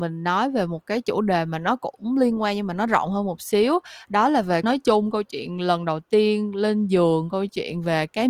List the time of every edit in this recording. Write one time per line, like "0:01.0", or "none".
0:04.6